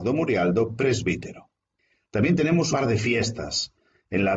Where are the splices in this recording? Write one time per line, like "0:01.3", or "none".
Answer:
0:02.7

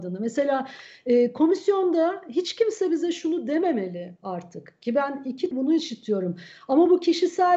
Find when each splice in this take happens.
0:05.5

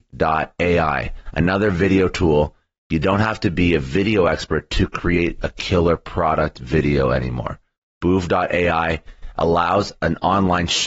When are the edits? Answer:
none

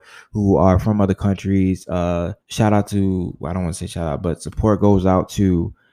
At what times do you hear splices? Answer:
0:02.4

